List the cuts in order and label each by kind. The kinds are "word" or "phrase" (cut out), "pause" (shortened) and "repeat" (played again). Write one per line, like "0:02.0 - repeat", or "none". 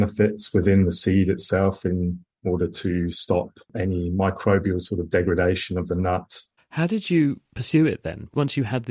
0:06.6 - pause

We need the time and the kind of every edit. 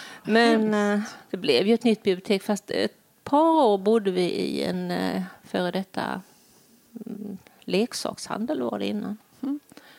none

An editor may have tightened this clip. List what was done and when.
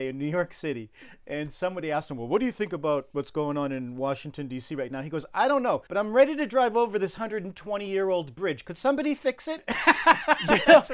0:05.9 - pause

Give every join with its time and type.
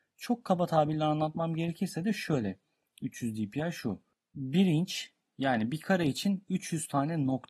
none

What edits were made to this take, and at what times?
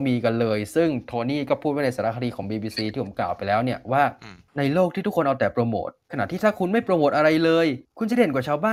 none

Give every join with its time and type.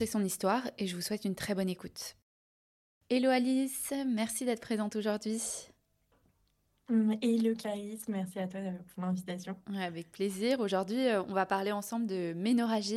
0:09.6 - pause

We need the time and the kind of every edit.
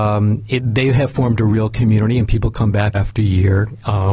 0:02.9 - word

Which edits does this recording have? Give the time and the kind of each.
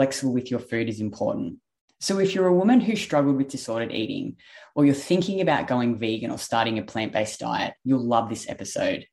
none

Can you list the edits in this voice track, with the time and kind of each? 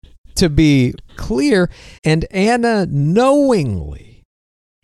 0:01.1 - word
0:02.0 - pause

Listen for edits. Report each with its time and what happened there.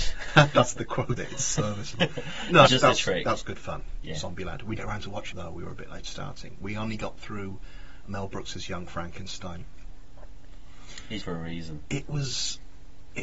0:01.2 - word
0:02.7 - word
0:04.8 - word
0:05.3 - word
0:08.0 - word
0:11.2 - word

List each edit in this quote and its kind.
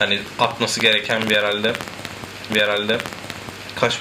0:02.5 - repeat

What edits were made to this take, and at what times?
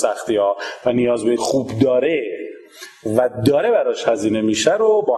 0:01.4 - phrase

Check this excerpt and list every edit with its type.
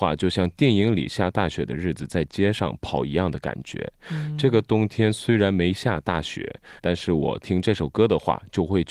0:06.8 - word

